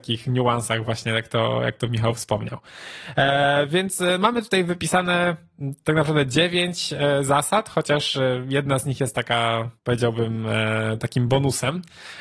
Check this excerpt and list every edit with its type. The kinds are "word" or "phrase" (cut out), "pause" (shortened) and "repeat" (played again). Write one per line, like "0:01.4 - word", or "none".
0:09.8 - pause